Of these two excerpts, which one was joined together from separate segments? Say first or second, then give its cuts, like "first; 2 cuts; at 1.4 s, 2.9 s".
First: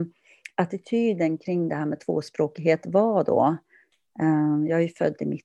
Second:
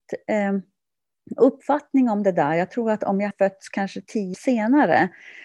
second; 2 cuts; at 3.3 s, 4.3 s